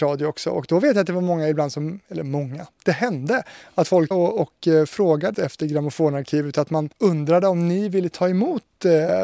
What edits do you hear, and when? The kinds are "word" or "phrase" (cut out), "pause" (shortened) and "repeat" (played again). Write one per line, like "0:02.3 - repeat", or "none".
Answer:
0:04.1 - word
0:05.3 - word
0:06.9 - pause